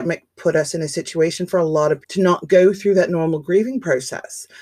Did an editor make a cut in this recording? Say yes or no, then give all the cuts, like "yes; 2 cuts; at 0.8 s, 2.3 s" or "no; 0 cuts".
yes; 1 cut; at 2.0 s